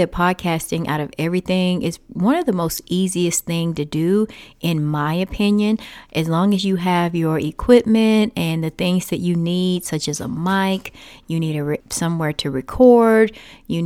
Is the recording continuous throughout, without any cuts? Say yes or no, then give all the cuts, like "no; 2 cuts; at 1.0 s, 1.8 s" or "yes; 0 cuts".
no; 1 cut; at 11.8 s